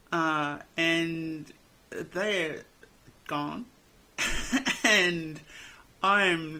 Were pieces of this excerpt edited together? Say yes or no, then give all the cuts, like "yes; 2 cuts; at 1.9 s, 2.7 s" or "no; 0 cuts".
no; 0 cuts